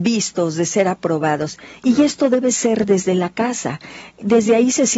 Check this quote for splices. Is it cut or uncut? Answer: uncut